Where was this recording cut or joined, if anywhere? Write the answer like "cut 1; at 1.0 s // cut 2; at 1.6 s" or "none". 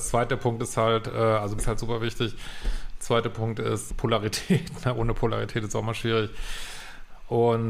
cut 1; at 1.6 s // cut 2; at 3.9 s